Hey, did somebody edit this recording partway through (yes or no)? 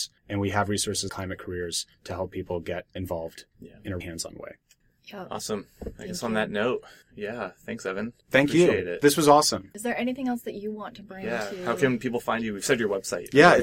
yes